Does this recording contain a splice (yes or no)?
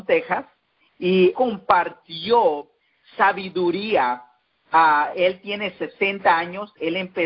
yes